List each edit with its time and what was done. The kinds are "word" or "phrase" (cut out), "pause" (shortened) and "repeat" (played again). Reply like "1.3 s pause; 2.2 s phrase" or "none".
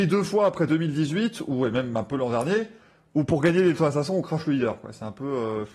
none